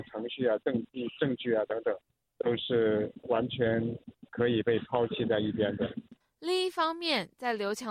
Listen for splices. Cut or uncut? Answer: cut